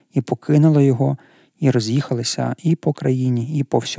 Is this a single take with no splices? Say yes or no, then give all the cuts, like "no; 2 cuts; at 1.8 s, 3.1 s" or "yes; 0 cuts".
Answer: yes; 0 cuts